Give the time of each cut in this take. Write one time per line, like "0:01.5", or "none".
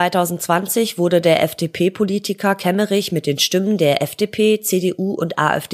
none